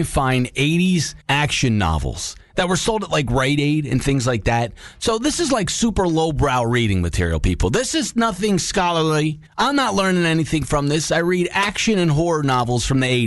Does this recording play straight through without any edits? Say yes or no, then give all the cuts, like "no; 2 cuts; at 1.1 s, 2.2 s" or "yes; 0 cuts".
no; 2 cuts; at 1.2 s, 9.5 s